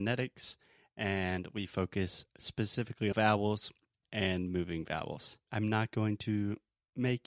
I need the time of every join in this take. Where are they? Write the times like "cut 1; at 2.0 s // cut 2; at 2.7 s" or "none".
cut 1; at 3.1 s // cut 2; at 4.0 s